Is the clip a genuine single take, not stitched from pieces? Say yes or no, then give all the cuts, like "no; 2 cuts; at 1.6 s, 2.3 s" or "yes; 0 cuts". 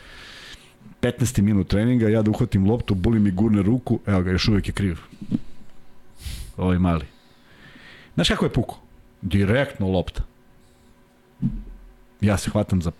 yes; 0 cuts